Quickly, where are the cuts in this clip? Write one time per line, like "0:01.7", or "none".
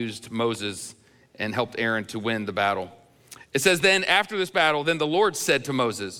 none